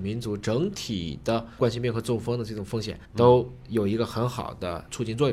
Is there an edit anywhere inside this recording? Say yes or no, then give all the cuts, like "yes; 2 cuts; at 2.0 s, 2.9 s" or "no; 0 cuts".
yes; 1 cut; at 3.0 s